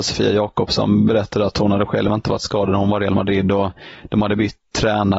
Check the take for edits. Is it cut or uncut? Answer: uncut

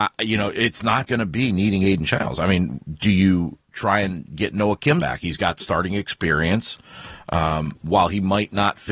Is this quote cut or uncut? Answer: cut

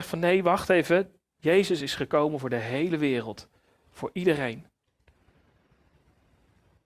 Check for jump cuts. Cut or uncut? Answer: uncut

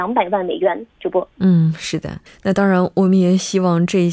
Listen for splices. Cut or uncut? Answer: cut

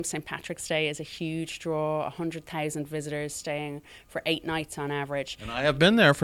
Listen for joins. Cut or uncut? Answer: uncut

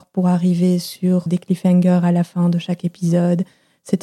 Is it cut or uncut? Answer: cut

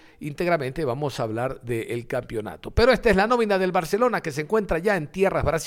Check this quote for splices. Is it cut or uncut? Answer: uncut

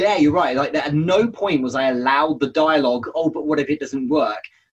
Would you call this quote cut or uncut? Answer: uncut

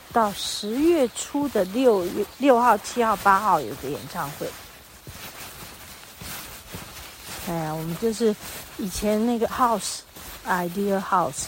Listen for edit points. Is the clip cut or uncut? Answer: cut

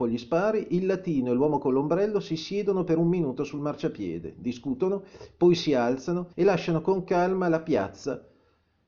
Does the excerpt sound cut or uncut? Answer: cut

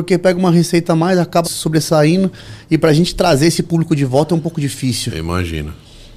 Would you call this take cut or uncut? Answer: cut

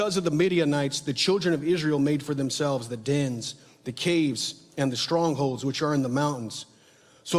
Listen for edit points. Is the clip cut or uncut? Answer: uncut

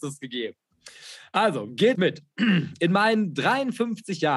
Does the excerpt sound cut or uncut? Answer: cut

